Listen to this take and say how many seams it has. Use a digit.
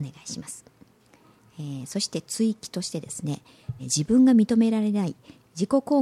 1